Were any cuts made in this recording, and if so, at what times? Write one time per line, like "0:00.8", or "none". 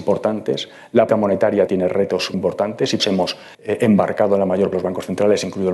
0:01.1
0:01.7
0:02.3
0:03.0
0:03.5
0:04.7